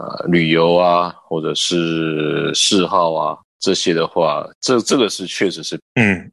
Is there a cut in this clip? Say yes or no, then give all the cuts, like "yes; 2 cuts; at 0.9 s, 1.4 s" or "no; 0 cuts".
yes; 1 cut; at 3.5 s